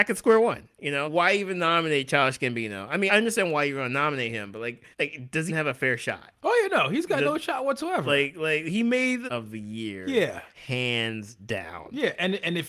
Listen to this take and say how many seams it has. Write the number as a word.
six